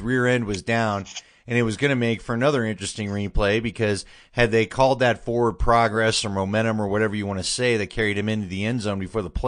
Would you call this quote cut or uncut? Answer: uncut